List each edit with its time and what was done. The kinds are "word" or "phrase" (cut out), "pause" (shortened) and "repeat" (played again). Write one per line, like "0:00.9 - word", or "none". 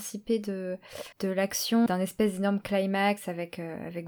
0:01.1 - pause
0:01.9 - word